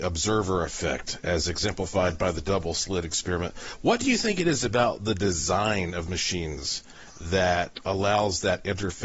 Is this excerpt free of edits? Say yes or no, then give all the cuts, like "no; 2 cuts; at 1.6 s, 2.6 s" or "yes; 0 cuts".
no; 1 cut; at 6.1 s